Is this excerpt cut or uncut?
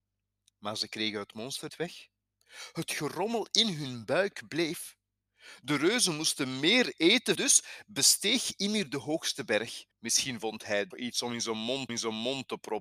cut